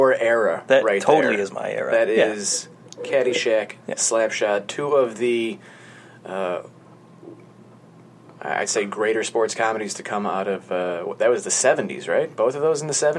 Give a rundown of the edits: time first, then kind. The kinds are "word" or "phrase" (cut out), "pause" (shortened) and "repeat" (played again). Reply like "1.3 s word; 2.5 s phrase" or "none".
none